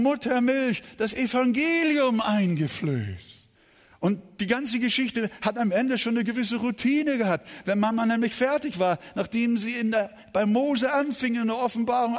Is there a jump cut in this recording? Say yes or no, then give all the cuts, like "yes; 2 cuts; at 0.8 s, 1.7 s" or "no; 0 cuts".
yes; 1 cut; at 3.5 s